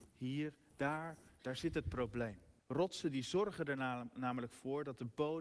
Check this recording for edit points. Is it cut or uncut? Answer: cut